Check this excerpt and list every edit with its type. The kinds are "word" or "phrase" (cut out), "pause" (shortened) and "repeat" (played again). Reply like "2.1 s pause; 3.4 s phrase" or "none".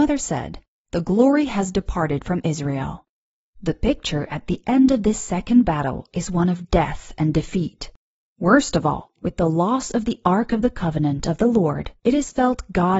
none